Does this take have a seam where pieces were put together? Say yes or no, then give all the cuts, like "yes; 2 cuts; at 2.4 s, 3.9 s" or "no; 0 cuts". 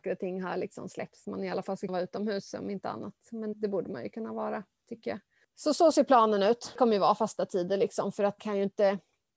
yes; 4 cuts; at 1.2 s, 1.9 s, 3.5 s, 8.4 s